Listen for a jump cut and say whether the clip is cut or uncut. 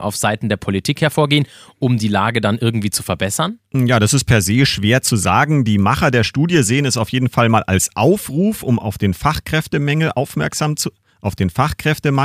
uncut